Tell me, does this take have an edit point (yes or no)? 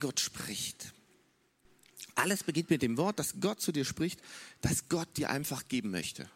no